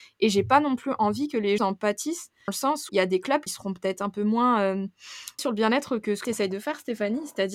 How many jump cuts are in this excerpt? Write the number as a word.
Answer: six